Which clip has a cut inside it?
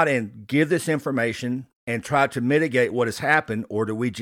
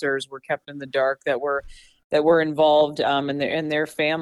first; 1 cut; at 1.8 s

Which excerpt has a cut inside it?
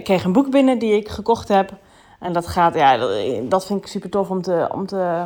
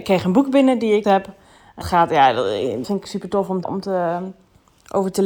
second; 4 cuts; at 1.0 s, 1.8 s, 2.8 s, 3.6 s

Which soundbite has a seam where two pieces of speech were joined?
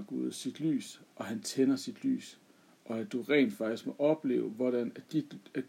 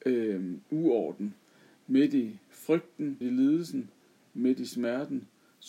second; 1 cut; at 3.2 s

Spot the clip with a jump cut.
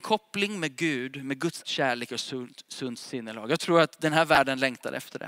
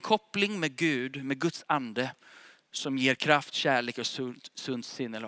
first; 1 cut; at 1.6 s

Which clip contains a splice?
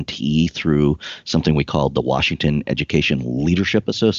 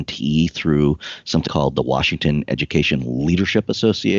second; 1 cut; at 1.5 s

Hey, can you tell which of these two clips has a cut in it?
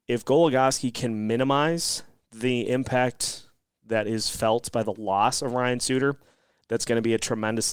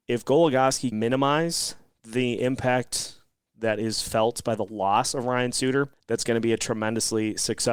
second; 2 cuts; at 0.9 s, 5.9 s

